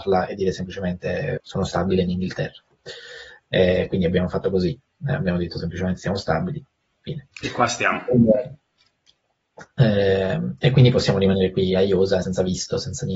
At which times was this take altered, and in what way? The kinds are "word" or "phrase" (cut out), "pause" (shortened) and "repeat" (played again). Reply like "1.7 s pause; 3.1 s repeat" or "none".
1.4 s word; 12.2 s word